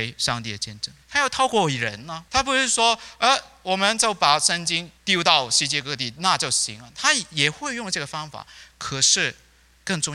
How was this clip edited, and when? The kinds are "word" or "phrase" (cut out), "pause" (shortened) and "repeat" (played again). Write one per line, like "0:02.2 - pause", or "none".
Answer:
0:01.0 - pause
0:02.3 - pause
0:05.0 - pause